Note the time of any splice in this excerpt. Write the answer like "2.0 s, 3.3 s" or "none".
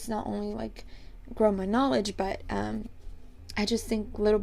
none